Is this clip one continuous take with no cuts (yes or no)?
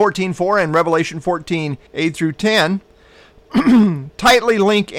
no